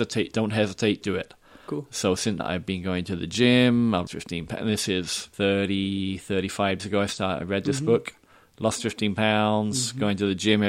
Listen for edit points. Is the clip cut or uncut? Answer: cut